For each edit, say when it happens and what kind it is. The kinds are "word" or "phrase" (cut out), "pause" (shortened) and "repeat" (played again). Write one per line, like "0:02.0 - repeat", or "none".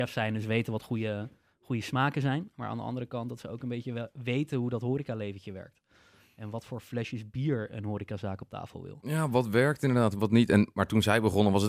none

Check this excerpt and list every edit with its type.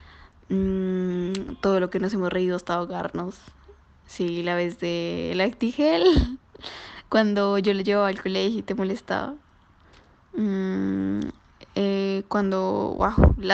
none

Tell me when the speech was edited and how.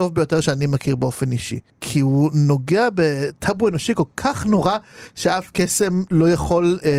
0:01.7 - pause

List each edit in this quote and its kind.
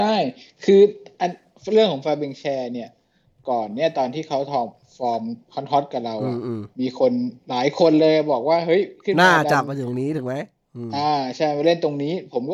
none

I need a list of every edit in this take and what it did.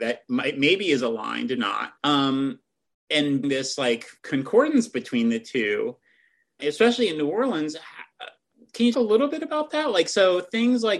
0:01.6 - word
0:02.0 - pause
0:03.4 - word
0:04.2 - pause
0:06.6 - word
0:08.9 - word

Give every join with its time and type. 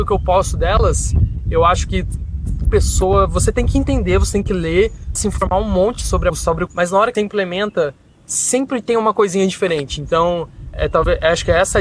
0:02.7 - word
0:05.2 - word
0:06.3 - word
0:06.7 - word
0:07.1 - word
0:10.7 - word

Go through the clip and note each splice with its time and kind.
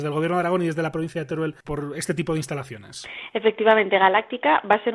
0:01.6 - pause

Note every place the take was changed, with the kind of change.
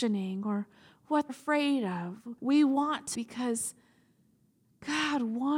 0:01.3 - word
0:02.4 - pause
0:03.1 - word

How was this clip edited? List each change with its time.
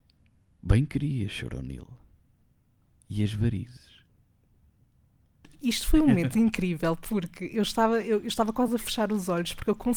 none

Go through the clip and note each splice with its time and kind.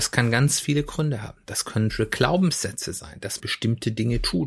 0:01.9 - word
0:03.4 - word

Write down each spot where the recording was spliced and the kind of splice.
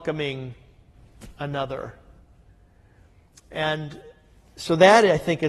none

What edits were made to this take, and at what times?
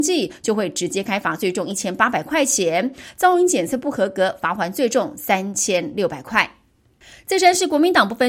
none

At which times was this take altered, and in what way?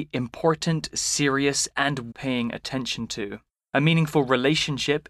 0:02.1 - word
0:03.5 - pause

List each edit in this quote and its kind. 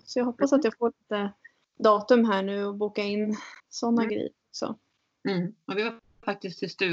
0:01.6 - pause
0:03.6 - pause
0:05.6 - pause

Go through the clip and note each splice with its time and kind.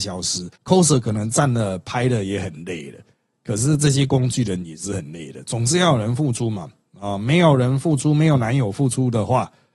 none

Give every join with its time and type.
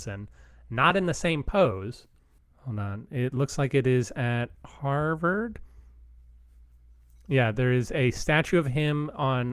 none

